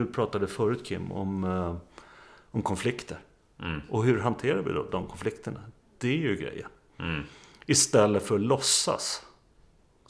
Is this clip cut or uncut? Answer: uncut